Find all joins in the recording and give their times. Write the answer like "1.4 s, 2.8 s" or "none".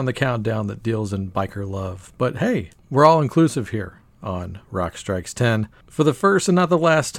none